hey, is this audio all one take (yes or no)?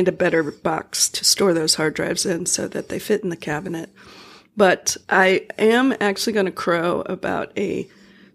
no